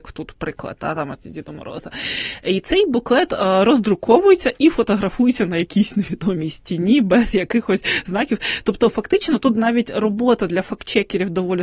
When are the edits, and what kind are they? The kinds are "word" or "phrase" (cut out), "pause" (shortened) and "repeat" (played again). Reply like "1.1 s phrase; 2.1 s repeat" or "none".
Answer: none